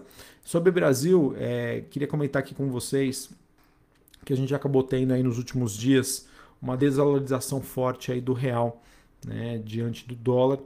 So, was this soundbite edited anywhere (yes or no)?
no